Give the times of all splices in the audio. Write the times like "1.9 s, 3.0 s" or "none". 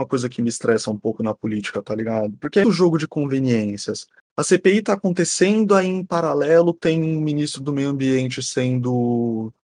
2.6 s